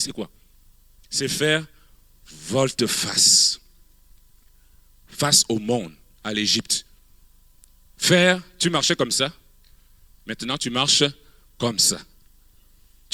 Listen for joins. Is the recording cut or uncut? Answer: uncut